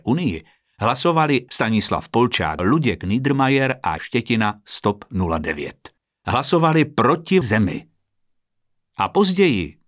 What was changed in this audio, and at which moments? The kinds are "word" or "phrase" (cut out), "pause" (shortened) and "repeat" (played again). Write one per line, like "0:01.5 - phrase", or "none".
0:01.5 - word
0:02.6 - phrase
0:04.0 - word
0:06.0 - pause
0:07.4 - word